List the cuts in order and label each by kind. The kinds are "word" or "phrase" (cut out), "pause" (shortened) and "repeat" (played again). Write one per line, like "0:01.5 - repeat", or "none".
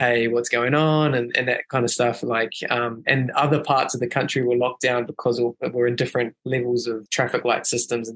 0:07.1 - word